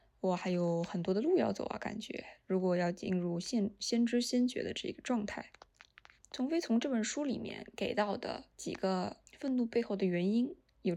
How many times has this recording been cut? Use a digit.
2